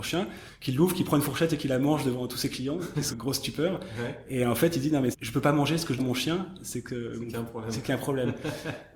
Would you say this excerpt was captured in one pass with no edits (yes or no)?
no